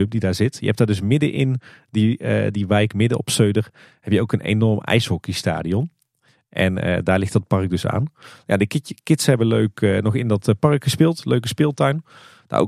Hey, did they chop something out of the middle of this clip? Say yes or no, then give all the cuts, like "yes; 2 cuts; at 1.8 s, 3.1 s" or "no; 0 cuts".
no; 0 cuts